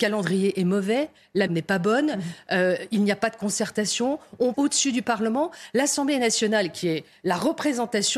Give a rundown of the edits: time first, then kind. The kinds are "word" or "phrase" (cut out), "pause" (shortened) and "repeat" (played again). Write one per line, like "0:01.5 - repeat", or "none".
0:01.5 - word
0:04.5 - word